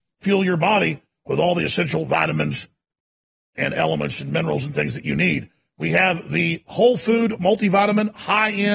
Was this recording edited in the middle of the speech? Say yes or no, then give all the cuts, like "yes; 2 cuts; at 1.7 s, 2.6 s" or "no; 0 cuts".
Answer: no; 0 cuts